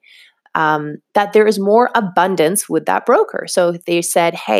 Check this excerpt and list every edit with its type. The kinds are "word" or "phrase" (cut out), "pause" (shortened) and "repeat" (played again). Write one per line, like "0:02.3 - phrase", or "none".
none

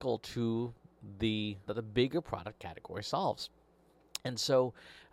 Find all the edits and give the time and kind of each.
0:01.7 - word

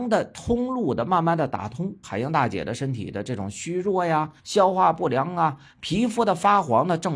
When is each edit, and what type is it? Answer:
0:02.0 - word
0:04.4 - pause

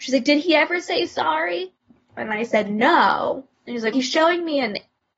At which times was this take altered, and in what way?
0:03.5 - pause
0:03.9 - word

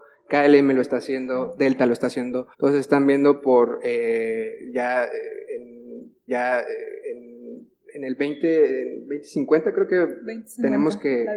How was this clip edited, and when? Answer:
0:02.5 - pause
0:06.3 - repeat

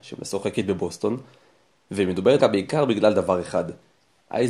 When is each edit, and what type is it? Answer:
0:02.4 - word

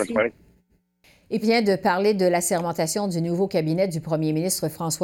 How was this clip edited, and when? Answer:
0:01.4 - word

